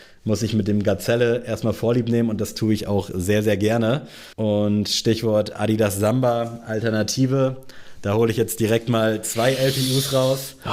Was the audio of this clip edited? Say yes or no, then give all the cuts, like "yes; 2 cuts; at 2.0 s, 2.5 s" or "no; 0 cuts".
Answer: yes; 1 cut; at 4.3 s